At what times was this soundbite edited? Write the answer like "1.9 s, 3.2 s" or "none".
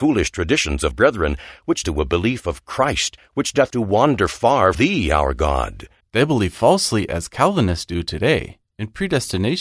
0.9 s, 1.8 s, 3.7 s, 4.7 s, 6.0 s